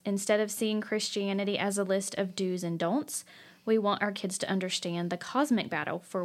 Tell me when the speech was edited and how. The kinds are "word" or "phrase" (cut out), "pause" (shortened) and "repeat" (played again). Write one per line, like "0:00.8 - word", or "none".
none